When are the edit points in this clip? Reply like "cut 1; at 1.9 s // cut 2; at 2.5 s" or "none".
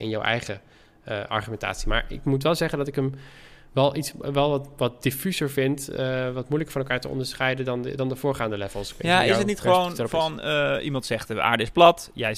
none